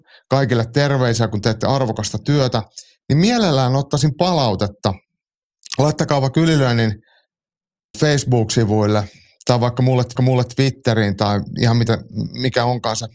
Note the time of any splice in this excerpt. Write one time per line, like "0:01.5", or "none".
0:07.9
0:10.2

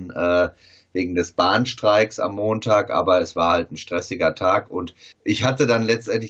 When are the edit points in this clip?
0:05.1

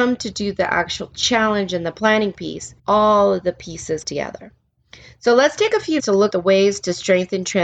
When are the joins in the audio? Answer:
0:02.8
0:04.0
0:06.0
0:06.3

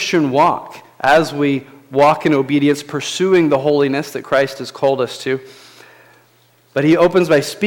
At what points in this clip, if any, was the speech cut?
none

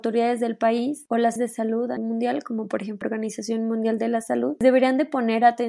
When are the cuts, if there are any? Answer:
0:01.4
0:02.0
0:03.0

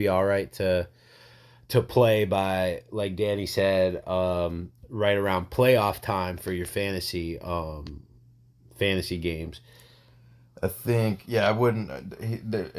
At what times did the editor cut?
none

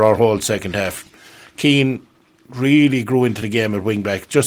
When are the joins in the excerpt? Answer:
none

